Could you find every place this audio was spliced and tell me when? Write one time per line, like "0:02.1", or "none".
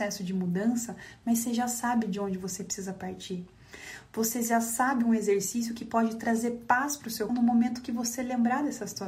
0:07.3